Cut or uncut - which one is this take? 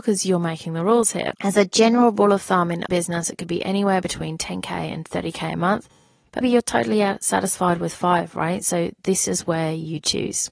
cut